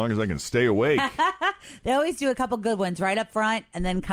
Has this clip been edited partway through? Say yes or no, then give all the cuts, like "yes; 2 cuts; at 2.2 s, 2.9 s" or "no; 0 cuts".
no; 0 cuts